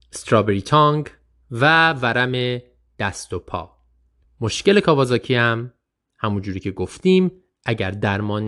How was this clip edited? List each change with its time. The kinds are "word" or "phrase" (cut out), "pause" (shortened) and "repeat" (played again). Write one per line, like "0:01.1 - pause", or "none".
none